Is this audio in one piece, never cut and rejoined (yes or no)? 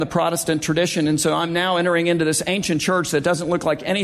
yes